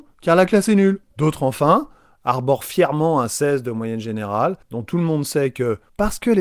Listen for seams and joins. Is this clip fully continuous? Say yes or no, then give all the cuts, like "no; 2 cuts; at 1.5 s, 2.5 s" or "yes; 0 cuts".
no; 2 cuts; at 1.1 s, 4.6 s